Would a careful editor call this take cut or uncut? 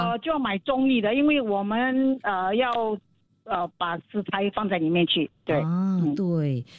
uncut